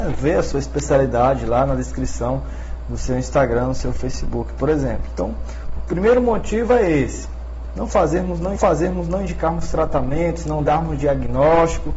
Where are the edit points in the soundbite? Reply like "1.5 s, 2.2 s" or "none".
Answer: 8.6 s